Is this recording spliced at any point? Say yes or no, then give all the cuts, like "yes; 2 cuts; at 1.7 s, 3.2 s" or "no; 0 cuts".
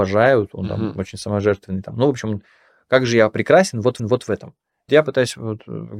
yes; 2 cuts; at 4.0 s, 4.9 s